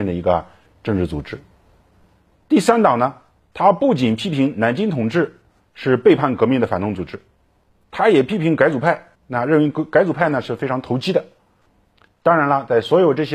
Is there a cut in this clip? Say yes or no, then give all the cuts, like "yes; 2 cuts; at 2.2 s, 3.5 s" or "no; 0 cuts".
yes; 1 cut; at 9.2 s